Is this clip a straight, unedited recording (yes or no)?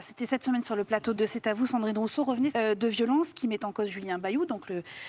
no